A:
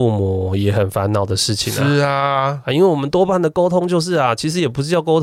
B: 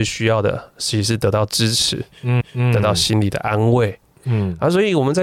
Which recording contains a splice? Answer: B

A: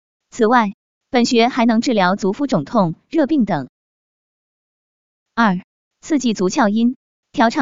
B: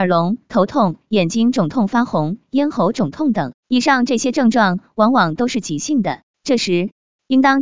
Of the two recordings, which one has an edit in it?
B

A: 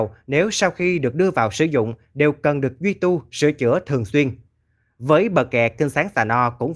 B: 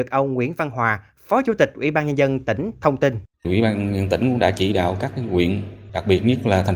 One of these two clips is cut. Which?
B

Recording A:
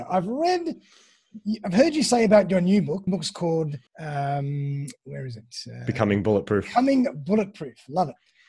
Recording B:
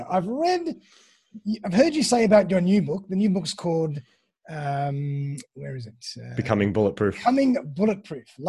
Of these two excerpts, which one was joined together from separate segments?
A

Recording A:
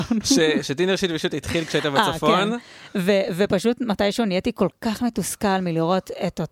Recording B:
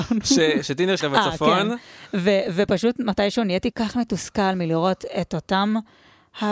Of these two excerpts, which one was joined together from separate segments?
B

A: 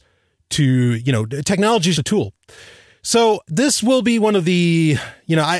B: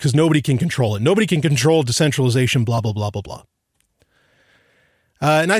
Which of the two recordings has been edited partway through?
A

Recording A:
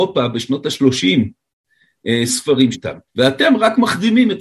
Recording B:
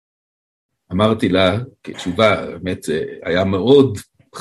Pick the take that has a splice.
A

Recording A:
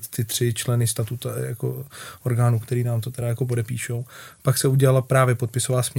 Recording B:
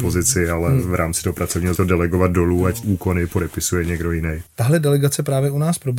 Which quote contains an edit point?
B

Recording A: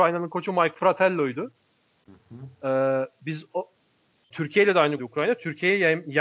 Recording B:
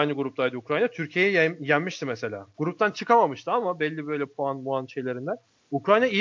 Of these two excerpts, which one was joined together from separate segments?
A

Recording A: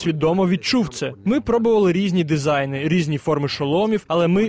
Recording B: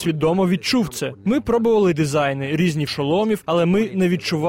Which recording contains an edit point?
B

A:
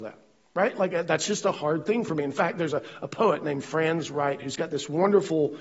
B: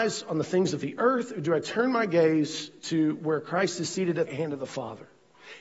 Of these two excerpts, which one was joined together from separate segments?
B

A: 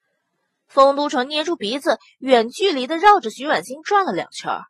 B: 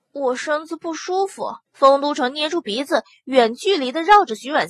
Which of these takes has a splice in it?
B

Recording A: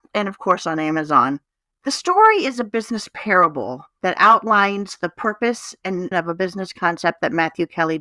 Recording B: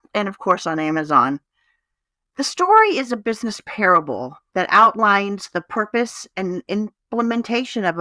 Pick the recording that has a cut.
A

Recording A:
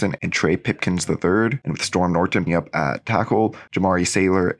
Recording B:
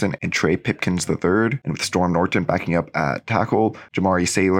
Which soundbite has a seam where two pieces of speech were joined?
A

